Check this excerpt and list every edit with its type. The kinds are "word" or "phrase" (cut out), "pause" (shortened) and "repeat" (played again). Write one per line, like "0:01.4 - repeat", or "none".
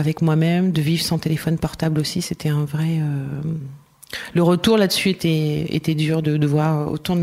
none